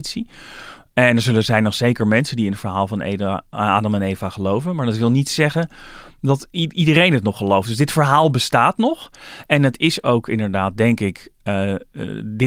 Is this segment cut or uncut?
uncut